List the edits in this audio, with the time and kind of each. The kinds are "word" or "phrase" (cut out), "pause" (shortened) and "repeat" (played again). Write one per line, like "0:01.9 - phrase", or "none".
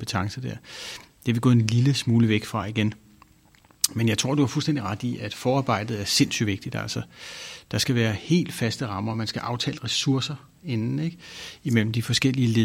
none

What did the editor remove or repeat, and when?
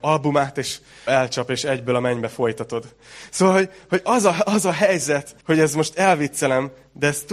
0:01.1 - phrase
0:05.4 - pause

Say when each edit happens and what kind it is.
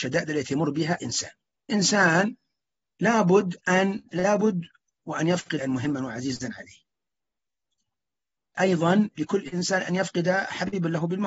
0:01.0 - word
0:01.7 - word
0:04.1 - word
0:05.6 - word
0:08.5 - word

